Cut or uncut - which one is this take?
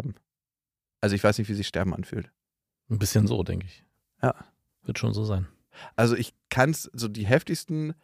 uncut